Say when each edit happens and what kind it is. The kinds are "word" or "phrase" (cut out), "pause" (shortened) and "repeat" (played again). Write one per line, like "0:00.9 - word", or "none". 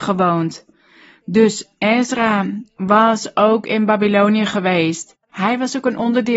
0:05.2 - pause